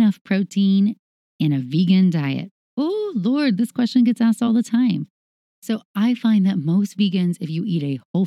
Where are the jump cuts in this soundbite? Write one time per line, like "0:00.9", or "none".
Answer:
none

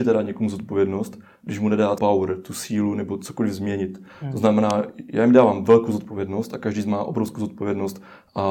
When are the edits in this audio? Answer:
0:02.0

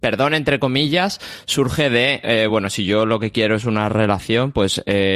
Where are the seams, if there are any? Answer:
none

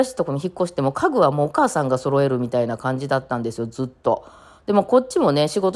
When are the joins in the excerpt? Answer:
none

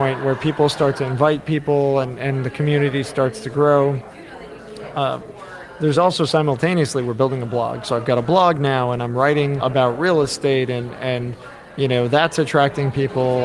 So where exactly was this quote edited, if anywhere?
0:09.6

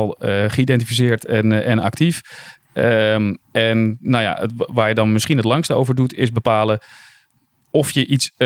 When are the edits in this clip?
0:03.4

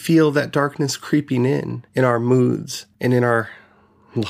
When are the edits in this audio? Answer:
0:01.9
0:02.9

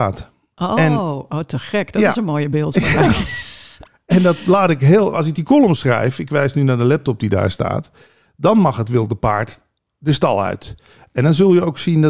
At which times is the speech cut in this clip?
none

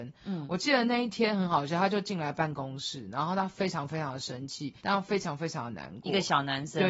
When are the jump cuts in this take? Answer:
0:04.8

